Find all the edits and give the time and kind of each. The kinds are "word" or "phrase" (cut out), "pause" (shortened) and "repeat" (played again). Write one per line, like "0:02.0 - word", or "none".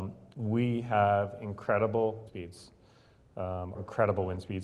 0:02.3 - word
0:03.7 - word